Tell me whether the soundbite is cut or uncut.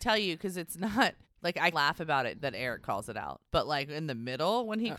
cut